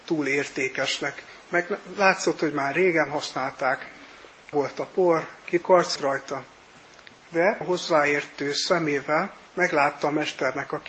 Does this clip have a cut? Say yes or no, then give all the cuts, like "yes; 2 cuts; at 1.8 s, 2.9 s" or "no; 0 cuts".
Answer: yes; 5 cuts; at 4.5 s, 5.6 s, 6.0 s, 7.6 s, 9.5 s